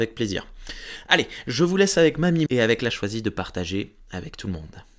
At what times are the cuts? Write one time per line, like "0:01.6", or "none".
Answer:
0:02.5
0:02.9